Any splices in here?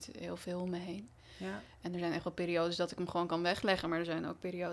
no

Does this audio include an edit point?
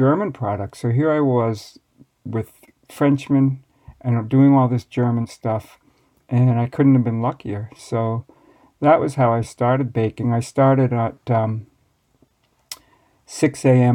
no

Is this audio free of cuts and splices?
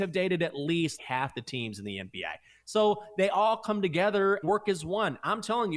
no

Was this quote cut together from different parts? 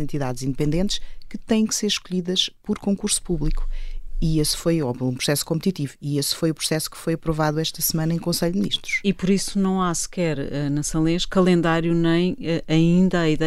no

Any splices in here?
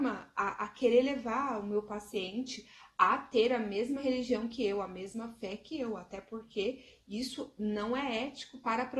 no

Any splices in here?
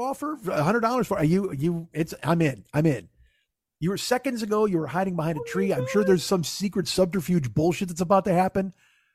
no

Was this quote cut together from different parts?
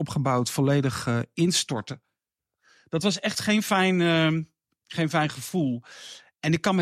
no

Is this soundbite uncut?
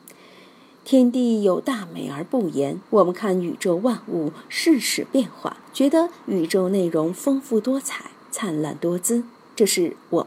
no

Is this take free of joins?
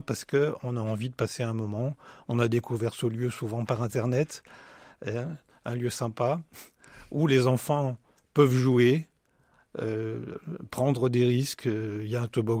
yes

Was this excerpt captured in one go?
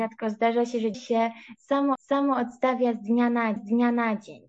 no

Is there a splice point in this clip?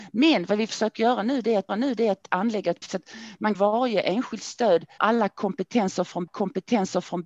yes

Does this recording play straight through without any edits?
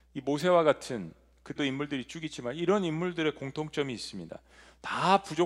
no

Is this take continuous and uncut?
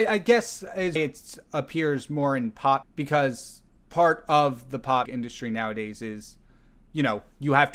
no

